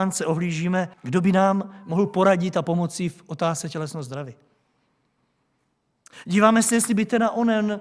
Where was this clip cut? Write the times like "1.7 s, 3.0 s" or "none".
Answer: 0.9 s